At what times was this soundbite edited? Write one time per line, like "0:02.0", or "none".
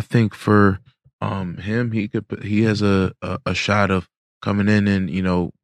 none